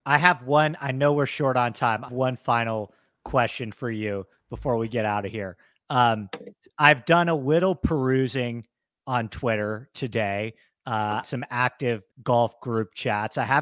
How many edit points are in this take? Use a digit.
3